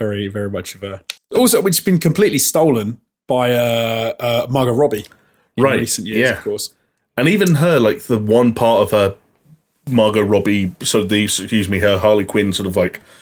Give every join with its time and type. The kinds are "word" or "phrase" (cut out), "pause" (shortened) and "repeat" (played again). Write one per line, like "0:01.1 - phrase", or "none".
0:01.2 - pause